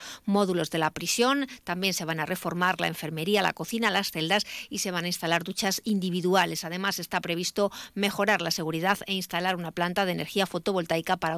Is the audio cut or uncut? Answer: uncut